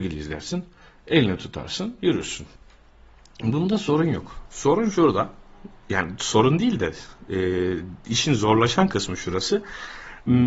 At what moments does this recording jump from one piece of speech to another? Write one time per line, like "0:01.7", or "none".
none